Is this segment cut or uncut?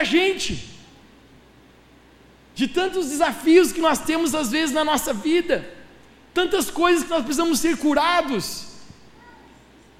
uncut